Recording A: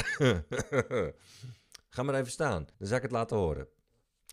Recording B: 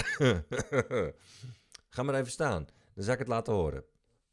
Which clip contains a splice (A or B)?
A